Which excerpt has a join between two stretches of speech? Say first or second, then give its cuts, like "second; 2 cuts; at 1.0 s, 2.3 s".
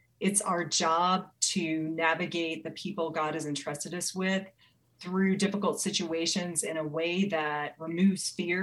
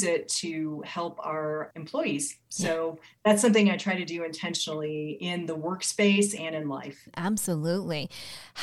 second; 1 cut; at 2.4 s